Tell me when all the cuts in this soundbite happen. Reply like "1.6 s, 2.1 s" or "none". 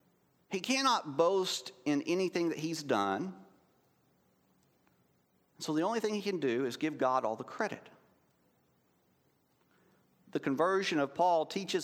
none